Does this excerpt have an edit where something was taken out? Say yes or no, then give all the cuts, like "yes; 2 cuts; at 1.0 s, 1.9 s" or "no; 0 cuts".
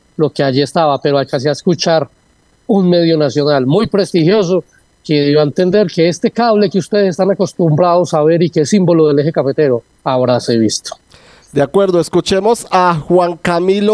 no; 0 cuts